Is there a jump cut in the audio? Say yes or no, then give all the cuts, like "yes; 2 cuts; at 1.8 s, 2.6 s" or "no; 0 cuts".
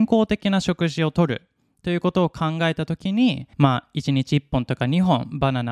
yes; 1 cut; at 3.5 s